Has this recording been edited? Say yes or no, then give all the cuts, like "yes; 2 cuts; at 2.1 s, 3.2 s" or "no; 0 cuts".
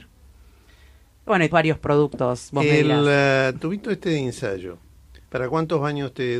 yes; 2 cuts; at 1.5 s, 5.3 s